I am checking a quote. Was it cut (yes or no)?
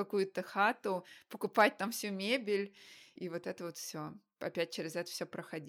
no